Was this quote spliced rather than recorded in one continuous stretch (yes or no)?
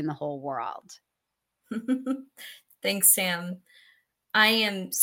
no